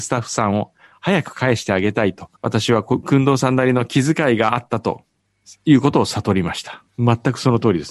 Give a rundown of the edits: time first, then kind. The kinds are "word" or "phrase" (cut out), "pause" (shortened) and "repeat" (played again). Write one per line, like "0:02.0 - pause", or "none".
0:02.4 - pause
0:05.4 - pause
0:06.9 - pause